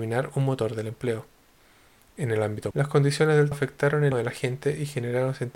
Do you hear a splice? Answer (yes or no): yes